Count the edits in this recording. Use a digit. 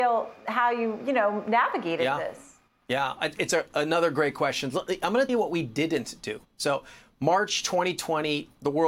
3